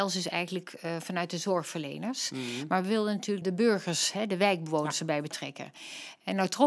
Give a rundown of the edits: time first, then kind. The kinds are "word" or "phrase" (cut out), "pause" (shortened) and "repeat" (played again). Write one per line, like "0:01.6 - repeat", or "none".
0:03.4 - word